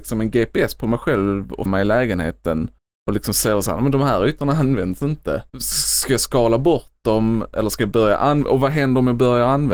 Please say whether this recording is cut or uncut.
cut